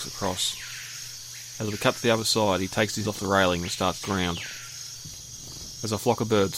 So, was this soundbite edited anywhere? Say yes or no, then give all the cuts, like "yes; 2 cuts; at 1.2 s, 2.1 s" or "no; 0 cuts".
yes; 2 cuts; at 3.0 s, 4.0 s